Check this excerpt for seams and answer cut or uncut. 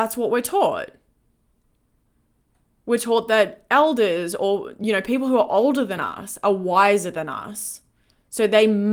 uncut